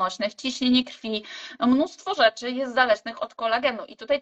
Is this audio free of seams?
yes; 0 cuts

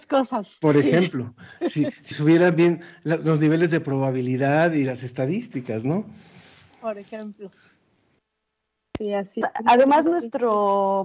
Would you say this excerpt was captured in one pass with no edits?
no; 2 cuts; at 2.1 s, 9.4 s

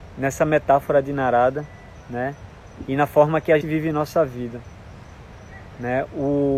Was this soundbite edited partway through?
yes; 1 cut; at 3.6 s

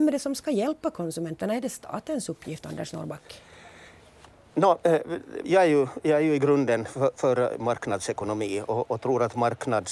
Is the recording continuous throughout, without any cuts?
no; 1 cut; at 5.4 s

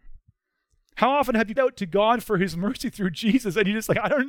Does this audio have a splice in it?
yes; 1 cut; at 1.6 s

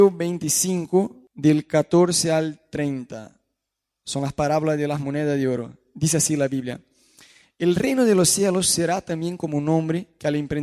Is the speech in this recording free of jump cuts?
yes; 0 cuts

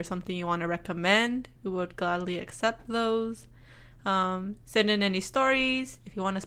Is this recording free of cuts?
no; 2 cuts; at 1.6 s, 4.6 s

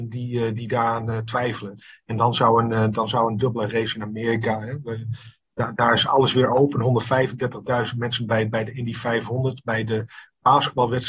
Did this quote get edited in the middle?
no; 0 cuts

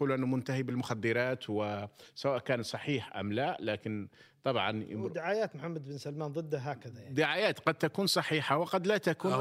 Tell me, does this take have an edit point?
no; 0 cuts

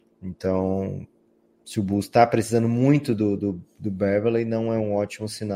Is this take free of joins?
yes; 0 cuts

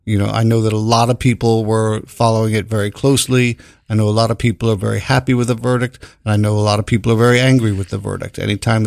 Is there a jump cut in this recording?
no; 0 cuts

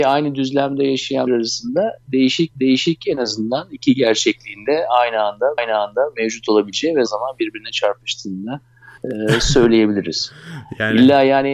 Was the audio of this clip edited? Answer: yes; 5 cuts; at 1.3 s, 2.5 s, 5.6 s, 7.1 s, 9.0 s

